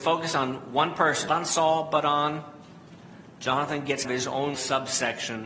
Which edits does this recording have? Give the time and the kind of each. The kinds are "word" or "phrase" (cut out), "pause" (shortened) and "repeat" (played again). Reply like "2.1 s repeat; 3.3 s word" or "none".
1.3 s word; 4.0 s word; 4.5 s word